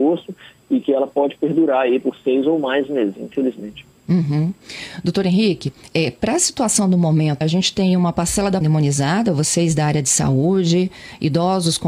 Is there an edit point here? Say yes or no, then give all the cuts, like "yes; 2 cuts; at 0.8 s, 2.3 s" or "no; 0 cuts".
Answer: yes; 3 cuts; at 3.9 s, 7.4 s, 8.6 s